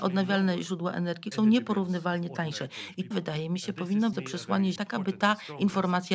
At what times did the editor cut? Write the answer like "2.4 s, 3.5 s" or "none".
1.3 s, 3.1 s, 4.1 s, 4.8 s

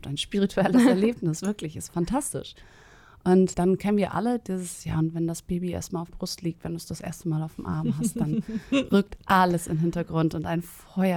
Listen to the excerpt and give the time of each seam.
1.9 s, 3.5 s, 6.1 s

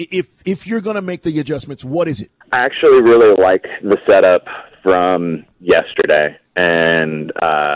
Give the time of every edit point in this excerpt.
2.4 s

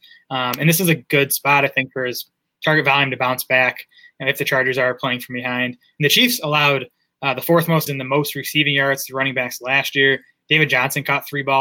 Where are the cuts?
7.9 s

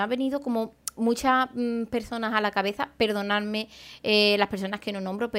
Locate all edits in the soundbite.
none

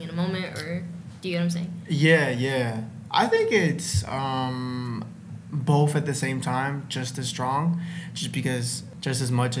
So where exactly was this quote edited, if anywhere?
none

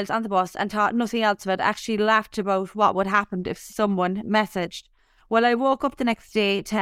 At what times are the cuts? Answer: none

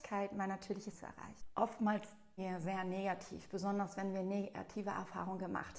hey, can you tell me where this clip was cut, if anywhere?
0.9 s, 2.4 s

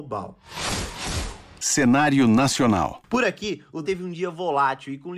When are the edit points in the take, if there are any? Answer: 3.8 s

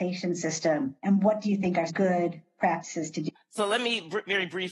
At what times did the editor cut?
1.0 s, 1.9 s, 3.3 s

